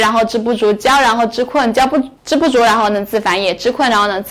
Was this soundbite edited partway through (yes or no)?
yes